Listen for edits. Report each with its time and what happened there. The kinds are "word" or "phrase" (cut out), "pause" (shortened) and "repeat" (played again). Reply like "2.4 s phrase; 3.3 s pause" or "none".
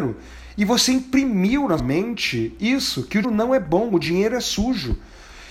1.8 s word; 3.2 s word